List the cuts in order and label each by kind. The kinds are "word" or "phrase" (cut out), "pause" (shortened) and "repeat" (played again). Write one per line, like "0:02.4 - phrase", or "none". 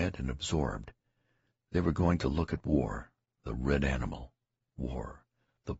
none